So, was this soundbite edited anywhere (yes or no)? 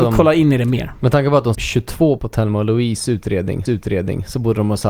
yes